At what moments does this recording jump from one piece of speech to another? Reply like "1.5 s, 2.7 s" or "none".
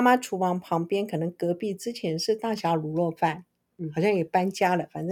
none

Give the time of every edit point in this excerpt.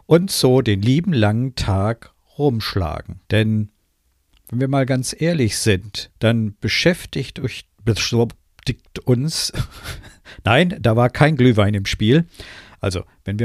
3.2 s, 6.2 s

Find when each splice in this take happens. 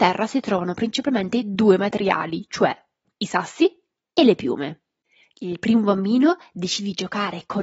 none

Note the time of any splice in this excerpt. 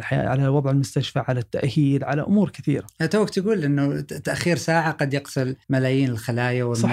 5.6 s

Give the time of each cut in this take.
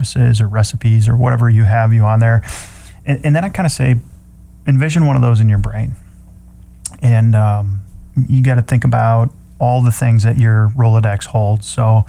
none

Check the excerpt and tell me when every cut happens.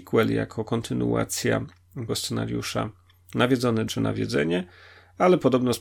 2.1 s, 3.9 s

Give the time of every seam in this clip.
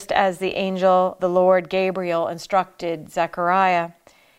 1.2 s

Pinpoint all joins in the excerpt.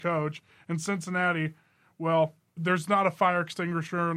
2.6 s

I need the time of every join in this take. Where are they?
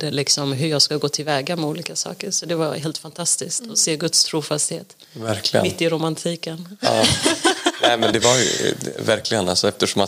8.1 s

